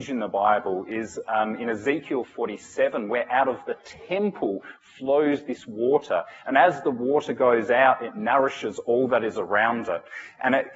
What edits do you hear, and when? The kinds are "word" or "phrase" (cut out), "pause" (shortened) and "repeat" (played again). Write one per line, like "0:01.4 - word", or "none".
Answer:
none